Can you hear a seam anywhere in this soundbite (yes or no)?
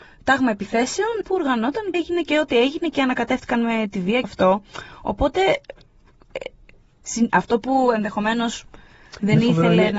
yes